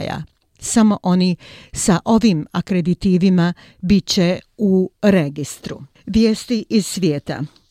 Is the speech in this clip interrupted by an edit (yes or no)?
no